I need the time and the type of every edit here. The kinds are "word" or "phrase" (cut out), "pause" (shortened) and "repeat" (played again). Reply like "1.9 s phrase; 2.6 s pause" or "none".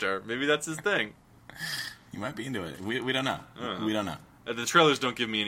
none